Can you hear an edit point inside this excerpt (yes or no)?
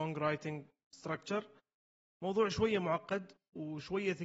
no